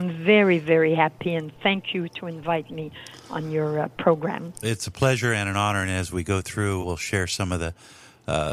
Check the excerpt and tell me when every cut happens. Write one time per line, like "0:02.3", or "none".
0:04.6
0:06.8